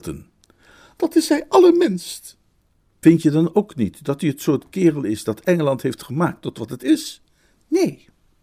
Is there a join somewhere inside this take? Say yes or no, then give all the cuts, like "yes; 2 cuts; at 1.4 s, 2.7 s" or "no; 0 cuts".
no; 0 cuts